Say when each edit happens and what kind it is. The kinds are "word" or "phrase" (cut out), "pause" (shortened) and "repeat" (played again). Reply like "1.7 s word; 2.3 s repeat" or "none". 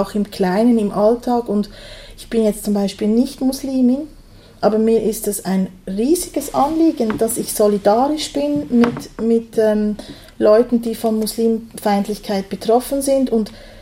none